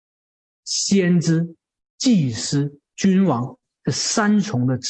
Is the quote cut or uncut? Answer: uncut